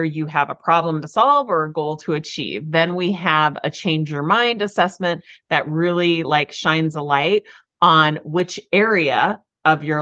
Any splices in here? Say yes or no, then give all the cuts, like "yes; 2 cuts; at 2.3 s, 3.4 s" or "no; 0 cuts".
no; 0 cuts